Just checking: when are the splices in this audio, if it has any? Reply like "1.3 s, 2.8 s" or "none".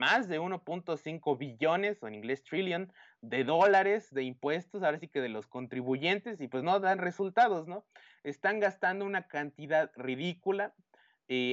none

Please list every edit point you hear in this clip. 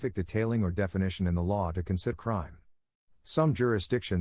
2.1 s

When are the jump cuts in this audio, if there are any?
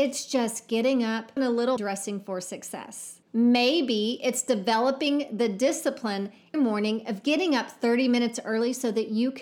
1.4 s, 1.8 s, 3.2 s, 6.5 s

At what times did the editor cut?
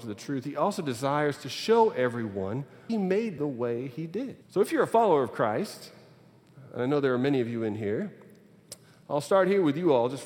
2.9 s, 3.4 s, 4.4 s

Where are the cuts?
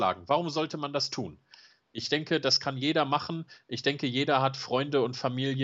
none

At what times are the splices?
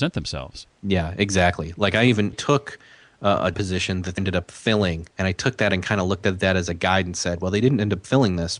2.3 s, 3.5 s, 4.2 s, 5.1 s

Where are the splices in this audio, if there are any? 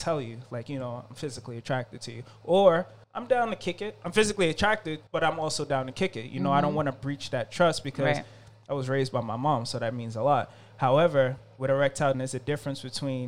3.0 s, 5.1 s, 12.1 s

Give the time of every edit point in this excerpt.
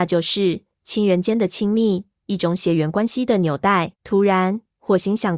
4.0 s

